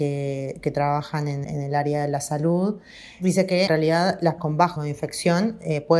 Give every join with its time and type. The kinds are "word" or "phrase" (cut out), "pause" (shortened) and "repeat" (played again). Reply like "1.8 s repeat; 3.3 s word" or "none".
1.4 s word; 3.7 s word; 4.4 s word; 4.8 s word